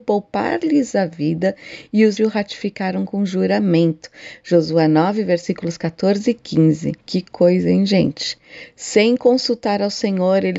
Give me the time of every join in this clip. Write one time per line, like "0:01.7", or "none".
0:02.2
0:07.0